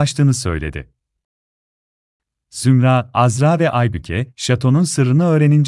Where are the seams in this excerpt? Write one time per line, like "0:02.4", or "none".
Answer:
none